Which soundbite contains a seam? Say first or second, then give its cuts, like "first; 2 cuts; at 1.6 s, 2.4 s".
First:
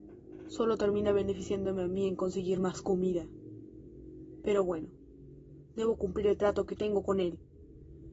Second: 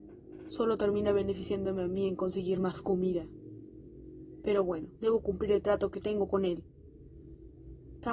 second; 1 cut; at 5.0 s